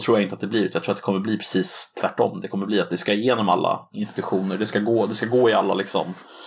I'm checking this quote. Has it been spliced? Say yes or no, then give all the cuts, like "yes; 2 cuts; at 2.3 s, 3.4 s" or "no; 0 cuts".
no; 0 cuts